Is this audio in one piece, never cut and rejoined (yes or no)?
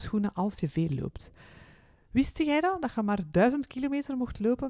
yes